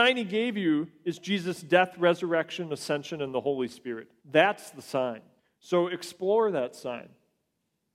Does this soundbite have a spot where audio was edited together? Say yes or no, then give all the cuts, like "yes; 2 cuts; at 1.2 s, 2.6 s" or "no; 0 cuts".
yes; 2 cuts; at 4.2 s, 5.4 s